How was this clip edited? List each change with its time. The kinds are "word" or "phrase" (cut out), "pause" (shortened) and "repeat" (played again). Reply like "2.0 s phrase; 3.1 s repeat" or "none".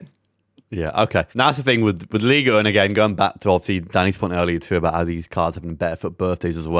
1.3 s pause

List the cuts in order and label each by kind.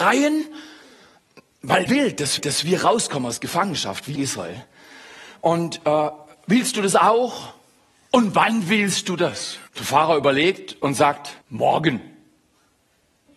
1.9 s word; 2.4 s repeat; 4.2 s phrase; 7.8 s pause; 9.7 s pause; 11.4 s pause

